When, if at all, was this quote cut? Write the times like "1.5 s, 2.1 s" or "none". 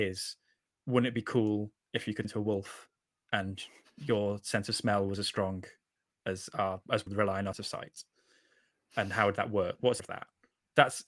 2.2 s, 7.1 s, 7.5 s, 10.0 s